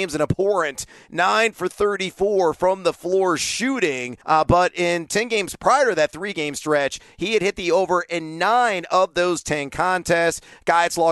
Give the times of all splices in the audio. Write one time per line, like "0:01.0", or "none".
0:04.2